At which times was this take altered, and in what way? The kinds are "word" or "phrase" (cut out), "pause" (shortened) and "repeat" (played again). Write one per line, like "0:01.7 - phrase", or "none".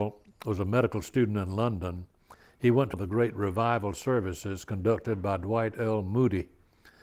0:02.9 - word